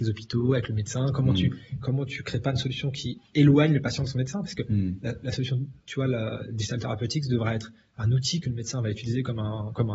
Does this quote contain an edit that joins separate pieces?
no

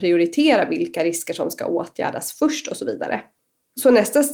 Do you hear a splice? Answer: no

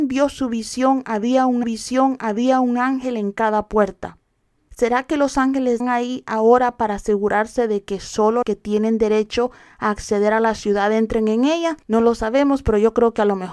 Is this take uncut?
no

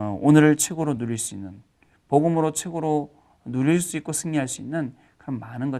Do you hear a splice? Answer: no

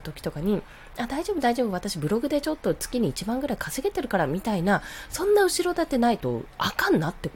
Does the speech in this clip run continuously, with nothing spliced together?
yes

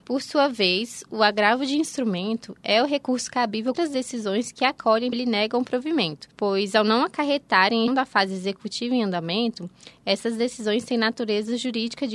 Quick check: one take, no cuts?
no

